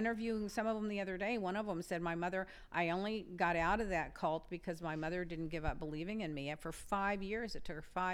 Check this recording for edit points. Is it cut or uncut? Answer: uncut